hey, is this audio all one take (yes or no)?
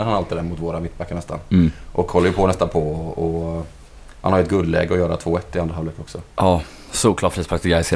yes